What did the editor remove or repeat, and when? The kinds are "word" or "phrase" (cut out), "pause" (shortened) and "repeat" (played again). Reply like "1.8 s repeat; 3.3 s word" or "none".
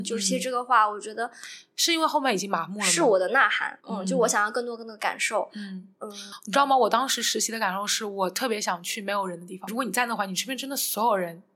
3.8 s pause